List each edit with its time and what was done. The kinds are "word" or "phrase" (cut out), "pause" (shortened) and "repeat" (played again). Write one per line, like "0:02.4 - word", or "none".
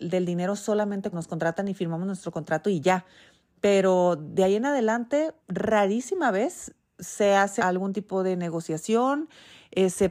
0:01.1 - word
0:05.4 - pause
0:07.6 - word